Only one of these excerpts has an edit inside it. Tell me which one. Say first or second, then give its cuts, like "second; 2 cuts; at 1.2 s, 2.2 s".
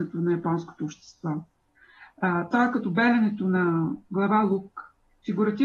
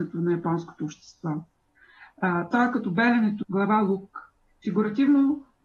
second; 1 cut; at 3.4 s